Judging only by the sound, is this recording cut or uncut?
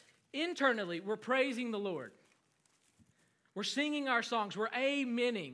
uncut